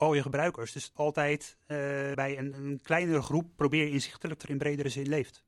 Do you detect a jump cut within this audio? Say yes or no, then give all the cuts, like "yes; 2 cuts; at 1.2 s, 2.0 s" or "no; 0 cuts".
yes; 4 cuts; at 1.0 s, 2.1 s, 2.5 s, 4.4 s